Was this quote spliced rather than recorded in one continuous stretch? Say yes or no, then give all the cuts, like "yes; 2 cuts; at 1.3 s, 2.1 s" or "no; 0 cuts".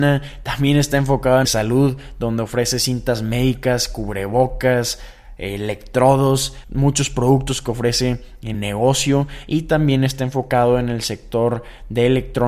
yes; 3 cuts; at 1.4 s, 6.6 s, 8.5 s